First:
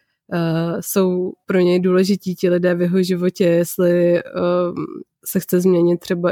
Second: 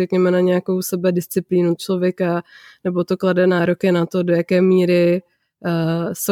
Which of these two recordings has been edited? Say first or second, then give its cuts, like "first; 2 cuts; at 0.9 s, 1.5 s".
second; 1 cut; at 1.8 s